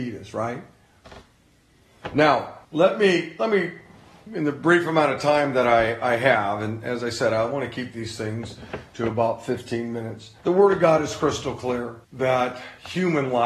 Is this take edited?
yes; 3 cuts; at 2.6 s, 10.4 s, 12.0 s

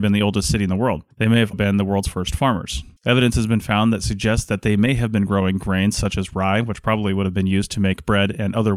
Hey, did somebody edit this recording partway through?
yes; 3 cuts; at 1.1 s, 1.5 s, 3.0 s

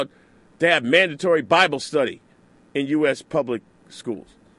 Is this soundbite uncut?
yes; 0 cuts

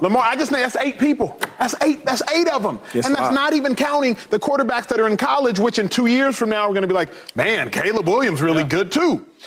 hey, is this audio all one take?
yes; 0 cuts

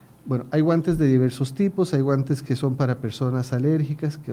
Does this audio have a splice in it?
no; 0 cuts

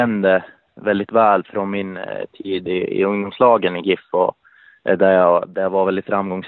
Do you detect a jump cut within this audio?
yes; 1 cut; at 4.6 s

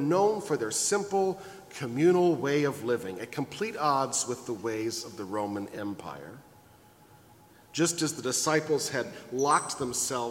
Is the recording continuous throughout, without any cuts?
yes; 0 cuts

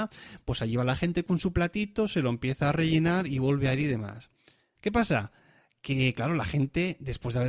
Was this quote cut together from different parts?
no; 0 cuts

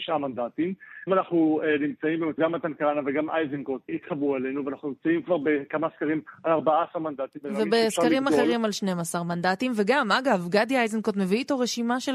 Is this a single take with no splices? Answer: no; 3 cuts; at 1.1 s, 2.4 s, 3.9 s

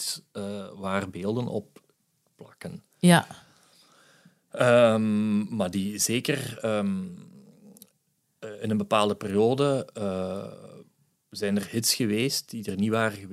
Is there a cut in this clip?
no; 0 cuts

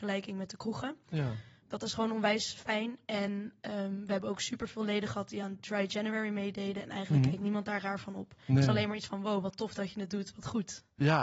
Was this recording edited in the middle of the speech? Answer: no; 0 cuts

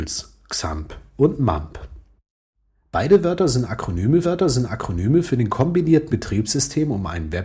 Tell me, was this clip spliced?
yes; 2 cuts; at 4.2 s, 6.1 s

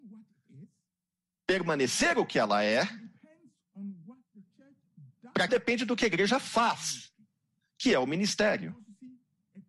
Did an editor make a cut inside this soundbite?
yes; 1 cut; at 5.5 s

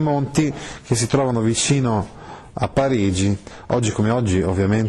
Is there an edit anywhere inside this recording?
no; 0 cuts

